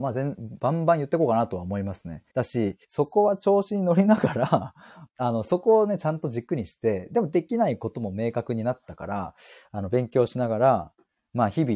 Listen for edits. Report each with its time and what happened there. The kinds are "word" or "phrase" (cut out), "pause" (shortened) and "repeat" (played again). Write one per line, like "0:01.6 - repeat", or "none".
0:02.3 - pause
0:02.8 - pause
0:05.1 - phrase